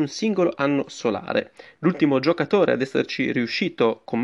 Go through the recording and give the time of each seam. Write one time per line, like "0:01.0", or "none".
none